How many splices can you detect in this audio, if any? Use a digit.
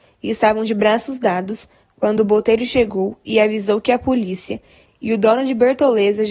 0